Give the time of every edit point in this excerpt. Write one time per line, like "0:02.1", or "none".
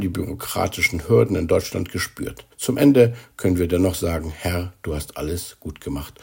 0:02.5